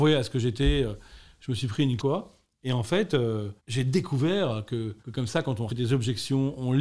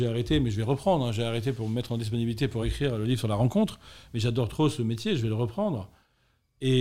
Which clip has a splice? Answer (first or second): first